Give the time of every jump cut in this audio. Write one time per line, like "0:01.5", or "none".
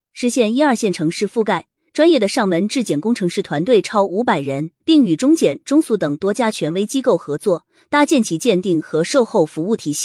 0:04.8